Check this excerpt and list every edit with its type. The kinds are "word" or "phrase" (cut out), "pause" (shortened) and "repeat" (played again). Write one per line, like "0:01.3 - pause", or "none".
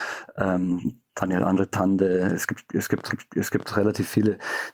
0:03.1 - repeat